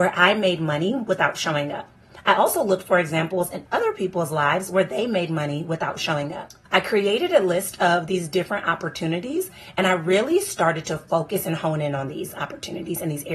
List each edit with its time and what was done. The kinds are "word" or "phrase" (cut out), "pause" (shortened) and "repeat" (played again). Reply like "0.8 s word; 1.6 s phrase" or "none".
6.7 s pause